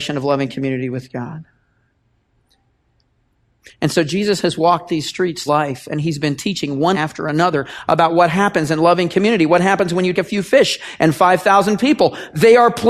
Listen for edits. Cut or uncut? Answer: cut